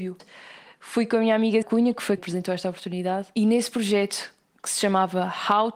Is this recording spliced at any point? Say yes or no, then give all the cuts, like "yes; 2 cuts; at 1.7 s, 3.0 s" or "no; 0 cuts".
yes; 2 cuts; at 1.6 s, 2.2 s